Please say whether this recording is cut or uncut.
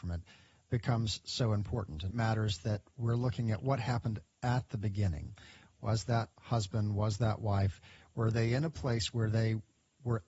cut